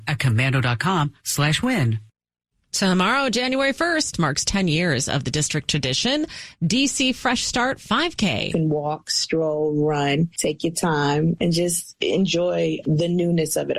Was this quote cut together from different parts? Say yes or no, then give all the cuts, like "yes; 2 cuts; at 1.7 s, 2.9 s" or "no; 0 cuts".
no; 0 cuts